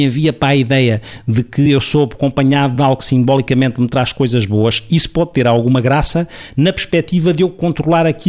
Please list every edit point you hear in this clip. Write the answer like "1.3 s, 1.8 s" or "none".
none